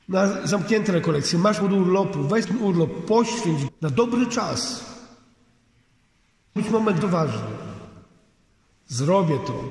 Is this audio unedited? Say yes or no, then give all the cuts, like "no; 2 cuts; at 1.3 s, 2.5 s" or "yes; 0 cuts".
no; 5 cuts; at 1.6 s, 2.4 s, 3.7 s, 6.6 s, 7.0 s